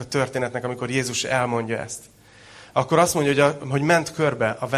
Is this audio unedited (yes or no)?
yes